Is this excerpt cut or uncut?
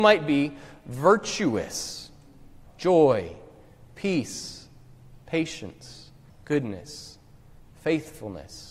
cut